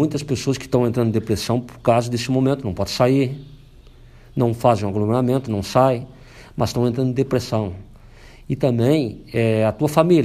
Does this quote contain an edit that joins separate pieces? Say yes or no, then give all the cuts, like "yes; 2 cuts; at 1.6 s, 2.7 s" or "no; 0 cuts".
no; 0 cuts